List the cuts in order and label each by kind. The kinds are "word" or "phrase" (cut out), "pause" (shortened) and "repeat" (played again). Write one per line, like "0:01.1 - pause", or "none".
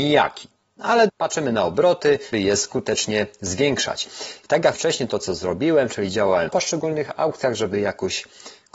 0:01.1 - word
0:02.3 - word
0:04.7 - word
0:06.5 - word